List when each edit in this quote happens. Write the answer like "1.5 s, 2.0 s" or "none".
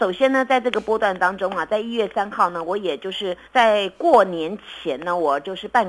3.5 s